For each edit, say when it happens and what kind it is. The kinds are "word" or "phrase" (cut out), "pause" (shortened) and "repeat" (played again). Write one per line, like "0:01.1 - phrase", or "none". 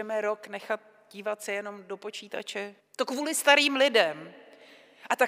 0:02.8 - pause